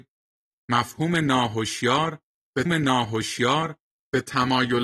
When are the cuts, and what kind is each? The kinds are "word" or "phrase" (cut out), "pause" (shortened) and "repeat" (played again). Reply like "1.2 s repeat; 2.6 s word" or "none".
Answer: 2.7 s repeat